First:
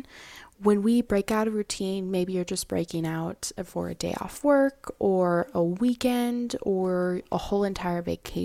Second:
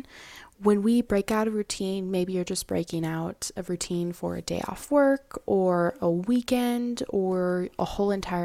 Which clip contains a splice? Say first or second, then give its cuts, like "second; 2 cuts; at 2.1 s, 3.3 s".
first; 1 cut; at 3.7 s